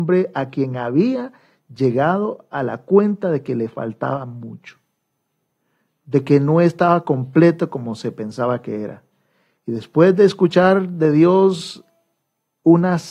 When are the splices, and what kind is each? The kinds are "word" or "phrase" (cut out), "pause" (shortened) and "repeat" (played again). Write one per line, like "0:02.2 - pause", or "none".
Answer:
none